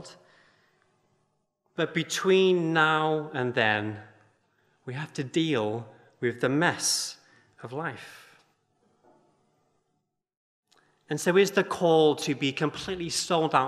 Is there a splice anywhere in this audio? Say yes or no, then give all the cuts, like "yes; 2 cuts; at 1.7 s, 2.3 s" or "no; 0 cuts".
no; 0 cuts